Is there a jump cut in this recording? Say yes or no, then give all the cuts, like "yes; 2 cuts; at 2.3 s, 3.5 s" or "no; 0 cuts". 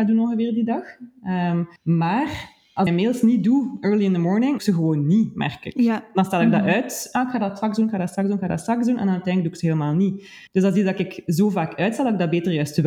yes; 4 cuts; at 1.8 s, 2.9 s, 4.6 s, 10.5 s